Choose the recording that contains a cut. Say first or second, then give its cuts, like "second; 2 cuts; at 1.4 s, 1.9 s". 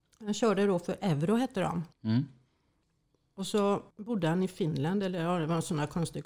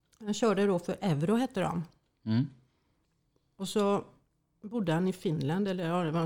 first; 2 cuts; at 1.9 s, 3.9 s